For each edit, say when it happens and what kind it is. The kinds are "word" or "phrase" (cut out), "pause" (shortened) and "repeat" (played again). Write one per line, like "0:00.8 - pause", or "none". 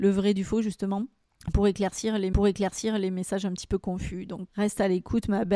0:02.3 - repeat
0:04.5 - word

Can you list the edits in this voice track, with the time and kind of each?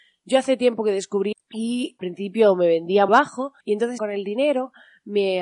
0:01.3 - word
0:02.0 - word
0:03.1 - word
0:03.6 - pause
0:04.0 - phrase

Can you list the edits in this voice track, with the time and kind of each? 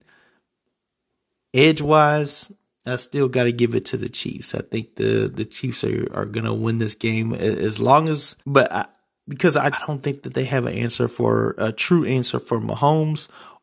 0:08.4 - pause
0:09.7 - word

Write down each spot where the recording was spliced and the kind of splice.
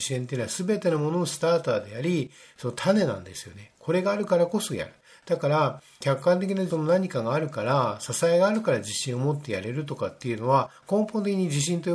none

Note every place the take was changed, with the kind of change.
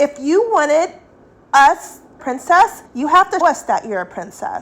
0:02.2 - phrase
0:02.9 - pause
0:03.4 - word

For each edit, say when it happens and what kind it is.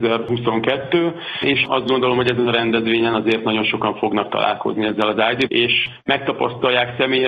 0:05.5 - word

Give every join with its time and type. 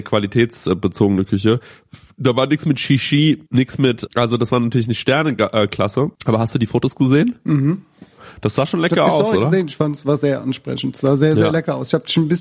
0:03.5 - pause
0:04.1 - word
0:06.1 - pause

